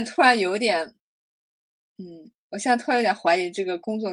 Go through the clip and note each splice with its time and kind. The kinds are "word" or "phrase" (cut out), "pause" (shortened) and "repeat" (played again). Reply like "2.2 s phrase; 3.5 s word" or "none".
none